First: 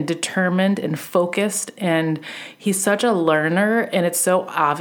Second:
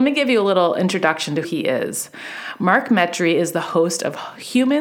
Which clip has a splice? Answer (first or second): second